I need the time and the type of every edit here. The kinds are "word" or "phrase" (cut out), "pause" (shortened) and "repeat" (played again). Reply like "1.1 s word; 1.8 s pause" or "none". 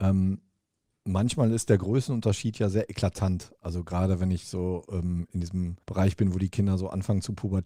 5.8 s pause